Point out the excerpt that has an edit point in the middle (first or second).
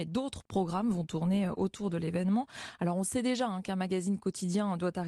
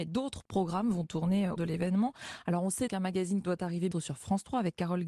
second